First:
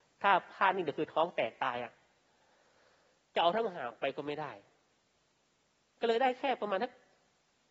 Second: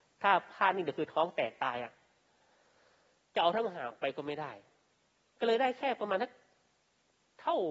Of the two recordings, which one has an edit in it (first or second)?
second